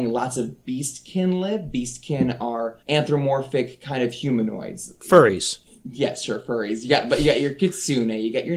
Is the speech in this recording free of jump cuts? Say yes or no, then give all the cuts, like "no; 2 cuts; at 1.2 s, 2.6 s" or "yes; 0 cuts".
no; 1 cut; at 2.8 s